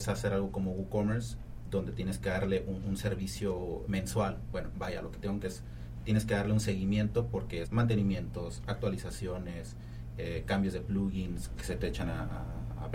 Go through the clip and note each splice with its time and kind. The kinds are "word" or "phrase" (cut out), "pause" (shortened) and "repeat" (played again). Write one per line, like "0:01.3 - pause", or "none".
0:03.9 - word
0:05.4 - word
0:07.6 - word
0:11.6 - word